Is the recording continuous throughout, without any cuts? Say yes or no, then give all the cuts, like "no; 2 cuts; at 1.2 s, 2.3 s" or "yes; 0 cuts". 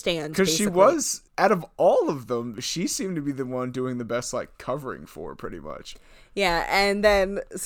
no; 1 cut; at 1.3 s